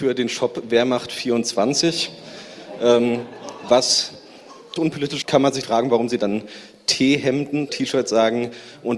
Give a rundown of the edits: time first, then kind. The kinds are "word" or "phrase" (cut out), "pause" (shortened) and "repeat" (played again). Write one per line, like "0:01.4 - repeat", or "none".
0:04.8 - word
0:05.2 - word
0:05.6 - word
0:07.7 - word